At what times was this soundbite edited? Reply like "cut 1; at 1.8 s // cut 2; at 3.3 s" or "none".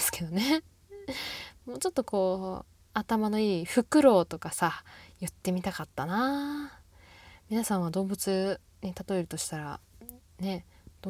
none